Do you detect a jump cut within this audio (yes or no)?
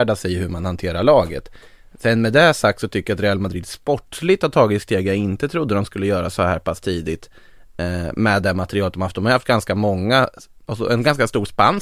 no